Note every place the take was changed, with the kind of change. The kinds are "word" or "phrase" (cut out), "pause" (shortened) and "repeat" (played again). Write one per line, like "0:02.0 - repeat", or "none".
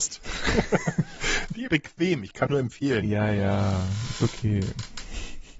0:01.7 - phrase
0:02.5 - word